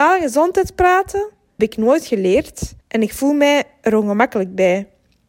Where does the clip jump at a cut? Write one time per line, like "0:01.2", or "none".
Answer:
0:01.6
0:02.8